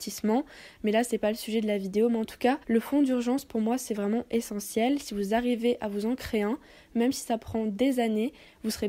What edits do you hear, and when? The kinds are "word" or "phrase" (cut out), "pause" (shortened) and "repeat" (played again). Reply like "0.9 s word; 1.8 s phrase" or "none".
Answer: 2.6 s pause